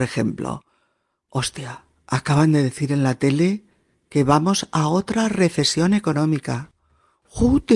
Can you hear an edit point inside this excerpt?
no; 0 cuts

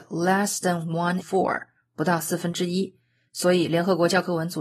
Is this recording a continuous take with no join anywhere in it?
no; 1 cut; at 1.2 s

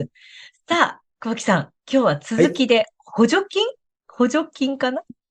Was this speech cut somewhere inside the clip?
yes; 2 cuts; at 1.1 s, 3.8 s

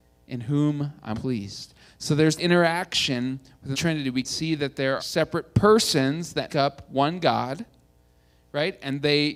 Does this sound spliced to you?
yes; 6 cuts; at 1.1 s, 2.4 s, 3.7 s, 4.2 s, 5.0 s, 6.5 s

